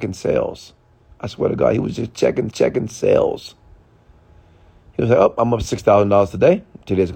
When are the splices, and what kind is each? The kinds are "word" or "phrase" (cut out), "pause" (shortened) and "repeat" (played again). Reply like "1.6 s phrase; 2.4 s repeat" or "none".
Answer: 2.5 s repeat